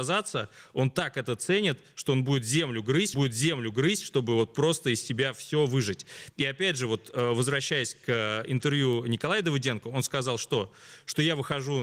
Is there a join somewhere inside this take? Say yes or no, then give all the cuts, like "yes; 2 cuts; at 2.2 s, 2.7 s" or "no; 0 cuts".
yes; 1 cut; at 3.1 s